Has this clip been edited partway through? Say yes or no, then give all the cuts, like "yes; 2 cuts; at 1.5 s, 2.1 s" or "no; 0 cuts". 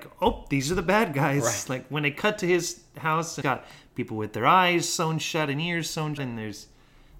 yes; 2 cuts; at 3.4 s, 6.2 s